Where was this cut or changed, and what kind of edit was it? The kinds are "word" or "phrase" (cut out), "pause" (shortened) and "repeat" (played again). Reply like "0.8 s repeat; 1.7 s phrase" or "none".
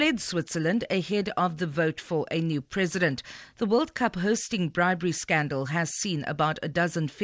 none